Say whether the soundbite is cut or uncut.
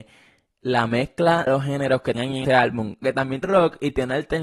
cut